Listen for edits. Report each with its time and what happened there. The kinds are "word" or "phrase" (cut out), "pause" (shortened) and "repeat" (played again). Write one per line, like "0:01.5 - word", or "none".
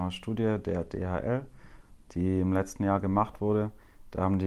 none